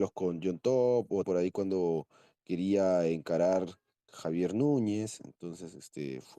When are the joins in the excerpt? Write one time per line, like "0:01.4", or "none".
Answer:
0:01.2
0:04.1